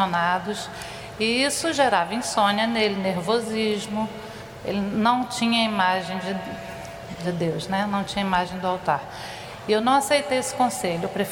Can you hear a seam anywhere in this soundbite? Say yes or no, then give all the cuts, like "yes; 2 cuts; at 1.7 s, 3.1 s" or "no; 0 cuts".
no; 0 cuts